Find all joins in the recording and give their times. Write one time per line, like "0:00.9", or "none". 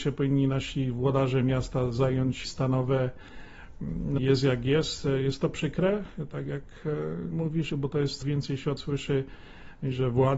0:02.4
0:04.2
0:07.3
0:07.7
0:08.2
0:08.8